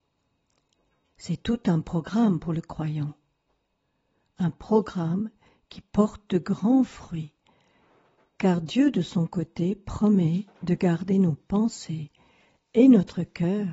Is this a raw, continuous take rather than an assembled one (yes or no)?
yes